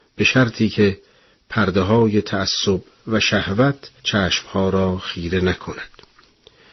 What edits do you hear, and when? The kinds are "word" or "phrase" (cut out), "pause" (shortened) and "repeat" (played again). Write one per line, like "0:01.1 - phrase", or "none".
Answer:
0:04.0 - pause

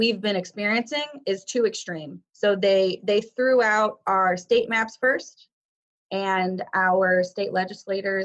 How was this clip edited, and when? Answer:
none

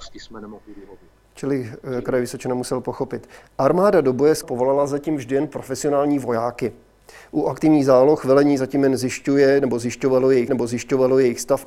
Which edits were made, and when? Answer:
0:04.4 - word
0:10.5 - repeat

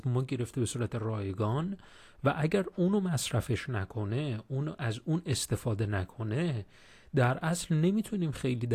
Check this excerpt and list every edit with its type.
none

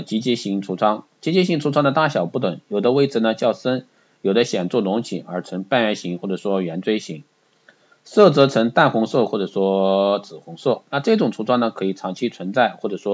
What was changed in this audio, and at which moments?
none

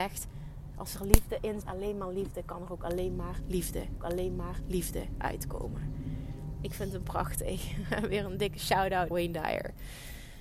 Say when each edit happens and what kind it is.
0:01.6 - word
0:04.0 - repeat
0:09.1 - word

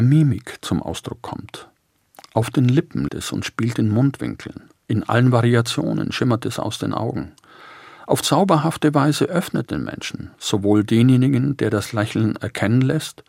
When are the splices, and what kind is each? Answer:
0:03.1 - word
0:09.7 - word
0:10.3 - pause

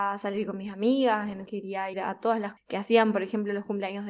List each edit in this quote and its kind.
0:01.5 - word
0:01.9 - word
0:02.6 - word

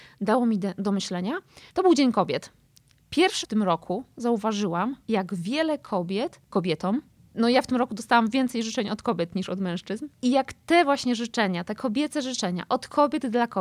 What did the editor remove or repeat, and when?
0:01.7 - pause
0:03.4 - word
0:05.0 - pause
0:06.5 - phrase
0:10.1 - pause

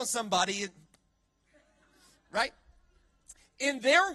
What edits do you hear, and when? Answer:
none

